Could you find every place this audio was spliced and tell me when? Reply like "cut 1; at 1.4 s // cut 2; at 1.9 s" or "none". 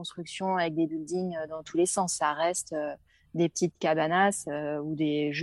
none